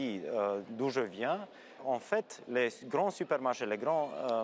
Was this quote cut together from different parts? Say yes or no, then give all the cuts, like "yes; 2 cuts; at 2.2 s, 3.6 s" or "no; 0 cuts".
yes; 1 cut; at 1.8 s